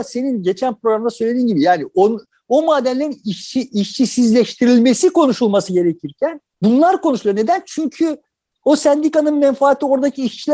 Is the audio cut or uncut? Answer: uncut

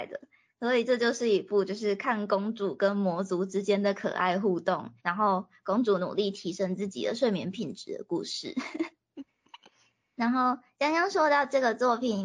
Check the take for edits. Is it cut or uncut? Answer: cut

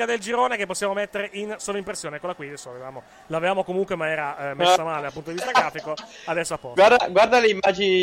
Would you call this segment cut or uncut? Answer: uncut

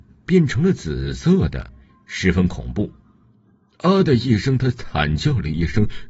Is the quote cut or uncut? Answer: uncut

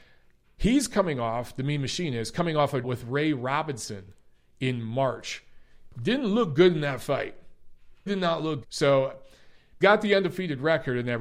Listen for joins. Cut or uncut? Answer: cut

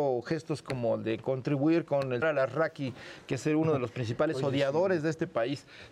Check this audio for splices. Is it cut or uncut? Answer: cut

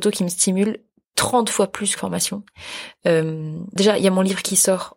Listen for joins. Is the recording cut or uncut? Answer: cut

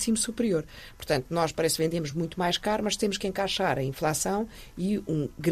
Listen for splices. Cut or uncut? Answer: uncut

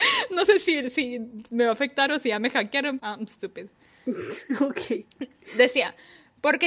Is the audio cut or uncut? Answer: cut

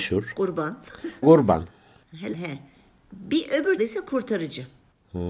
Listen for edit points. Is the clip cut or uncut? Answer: cut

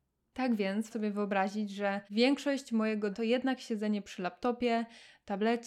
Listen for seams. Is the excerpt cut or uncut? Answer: cut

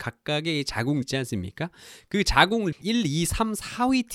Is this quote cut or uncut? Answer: cut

